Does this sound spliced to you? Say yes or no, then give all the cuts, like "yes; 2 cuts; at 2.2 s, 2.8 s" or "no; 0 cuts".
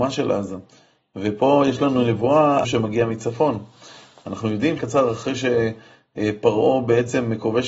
yes; 2 cuts; at 2.6 s, 4.8 s